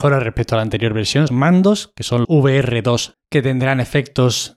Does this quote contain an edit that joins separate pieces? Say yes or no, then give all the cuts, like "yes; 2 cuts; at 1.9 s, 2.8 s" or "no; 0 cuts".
yes; 3 cuts; at 1.3 s, 2.2 s, 3.1 s